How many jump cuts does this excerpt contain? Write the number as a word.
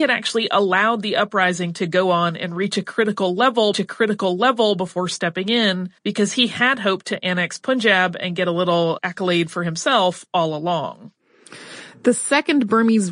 three